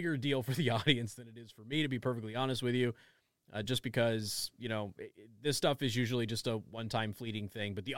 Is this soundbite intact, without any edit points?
yes; 0 cuts

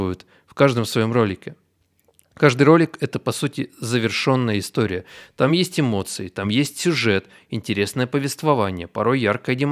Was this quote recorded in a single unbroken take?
yes; 0 cuts

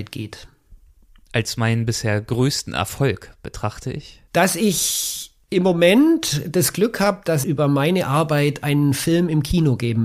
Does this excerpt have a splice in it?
yes; 2 cuts; at 4.3 s, 7.4 s

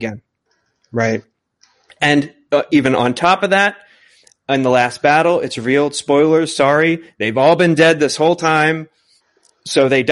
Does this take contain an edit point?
no; 0 cuts

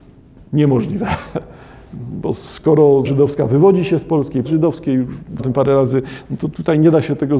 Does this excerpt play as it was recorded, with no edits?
no; 3 cuts; at 3.0 s, 4.4 s, 5.4 s

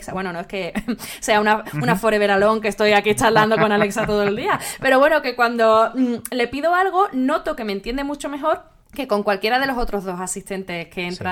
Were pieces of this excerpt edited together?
yes; 1 cut; at 8.8 s

